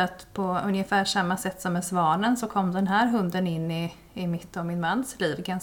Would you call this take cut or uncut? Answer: uncut